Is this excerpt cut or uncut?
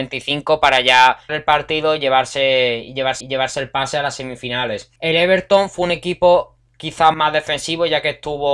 cut